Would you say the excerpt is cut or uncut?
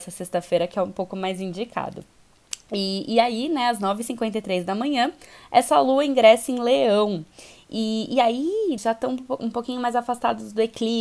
cut